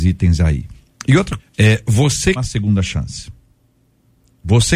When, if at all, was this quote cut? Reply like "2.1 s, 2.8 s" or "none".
1.4 s, 2.4 s

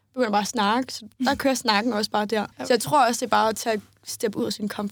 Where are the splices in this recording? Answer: 1.1 s, 2.5 s

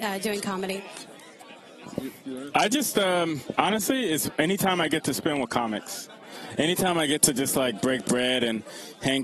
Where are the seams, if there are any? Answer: none

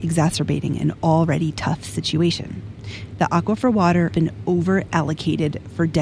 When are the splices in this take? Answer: 4.1 s

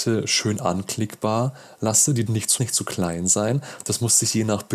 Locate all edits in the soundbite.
2.3 s, 2.6 s

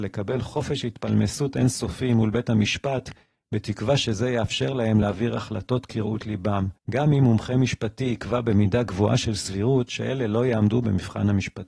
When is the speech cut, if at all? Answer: none

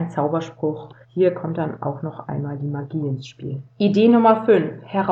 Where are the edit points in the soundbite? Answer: 1.0 s, 3.7 s

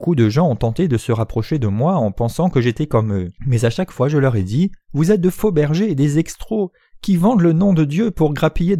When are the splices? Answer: 3.4 s, 4.8 s

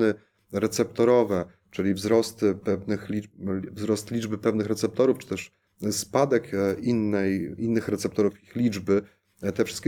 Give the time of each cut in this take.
none

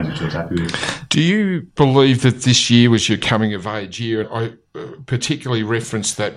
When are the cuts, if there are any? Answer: 4.2 s

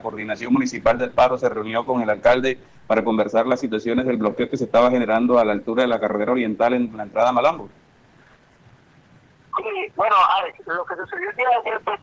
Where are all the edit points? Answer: none

